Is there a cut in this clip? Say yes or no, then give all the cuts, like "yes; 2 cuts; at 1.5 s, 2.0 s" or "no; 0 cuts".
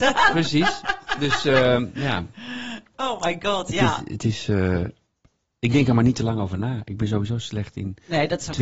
no; 0 cuts